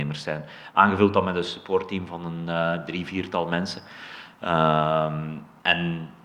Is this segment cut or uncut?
uncut